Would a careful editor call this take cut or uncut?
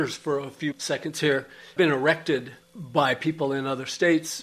cut